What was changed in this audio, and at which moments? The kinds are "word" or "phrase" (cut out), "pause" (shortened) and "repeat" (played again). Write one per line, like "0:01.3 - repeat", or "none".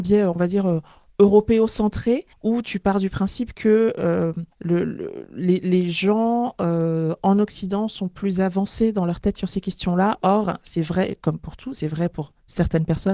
0:02.3 - pause
0:04.5 - pause